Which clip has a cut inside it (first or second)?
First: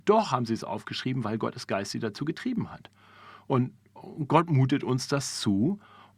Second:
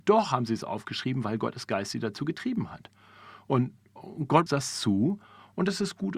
second